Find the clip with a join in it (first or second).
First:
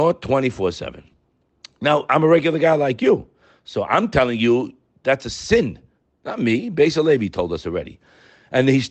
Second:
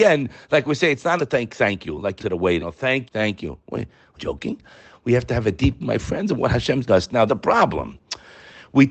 second